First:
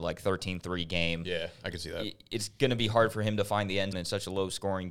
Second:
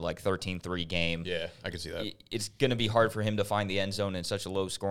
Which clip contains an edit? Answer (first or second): first